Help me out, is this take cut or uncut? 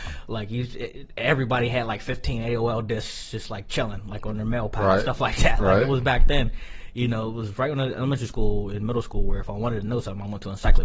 uncut